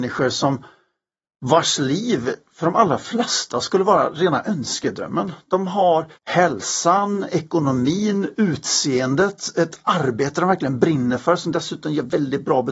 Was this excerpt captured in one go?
no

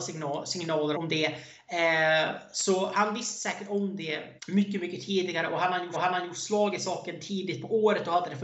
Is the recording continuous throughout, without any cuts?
no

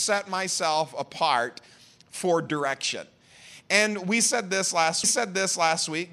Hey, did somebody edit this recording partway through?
yes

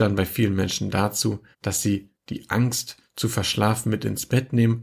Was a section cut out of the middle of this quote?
yes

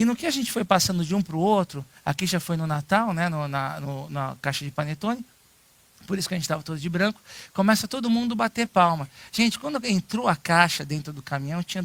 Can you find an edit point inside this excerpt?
no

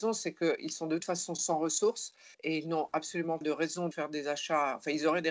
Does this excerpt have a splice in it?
yes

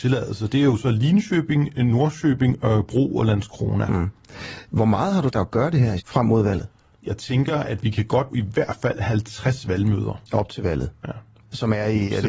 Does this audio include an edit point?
yes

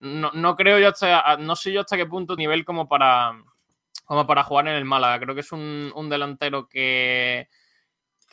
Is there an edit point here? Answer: yes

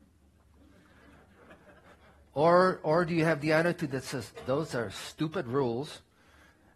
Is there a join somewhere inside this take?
no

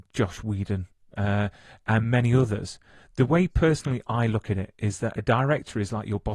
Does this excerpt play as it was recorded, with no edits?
yes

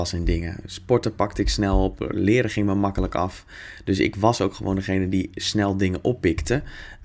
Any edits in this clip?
no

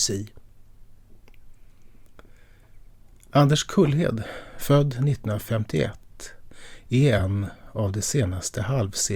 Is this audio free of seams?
yes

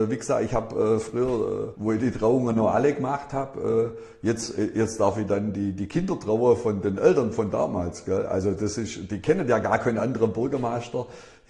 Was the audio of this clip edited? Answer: yes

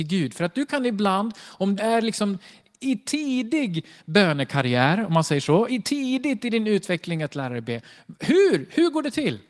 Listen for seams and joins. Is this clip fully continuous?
no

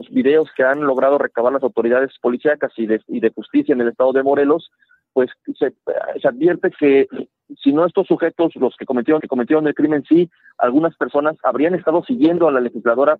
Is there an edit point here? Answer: yes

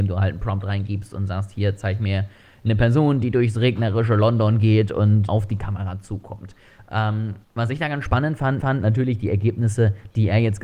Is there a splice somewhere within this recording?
yes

